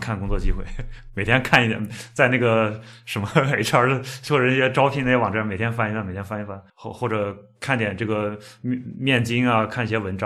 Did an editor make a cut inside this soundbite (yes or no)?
yes